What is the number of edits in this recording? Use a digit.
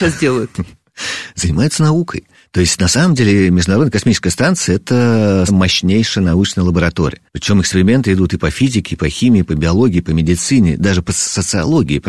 3